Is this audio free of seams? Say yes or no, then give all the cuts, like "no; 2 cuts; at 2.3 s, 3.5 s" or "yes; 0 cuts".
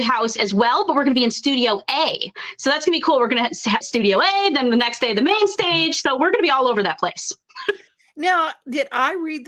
no; 1 cut; at 3.8 s